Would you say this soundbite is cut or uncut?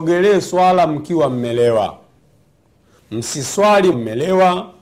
cut